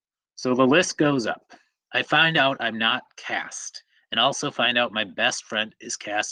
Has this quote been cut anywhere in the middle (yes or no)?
no